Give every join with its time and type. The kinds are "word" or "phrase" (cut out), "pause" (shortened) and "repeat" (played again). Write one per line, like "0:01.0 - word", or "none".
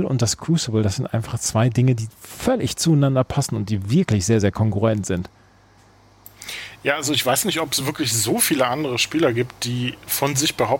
none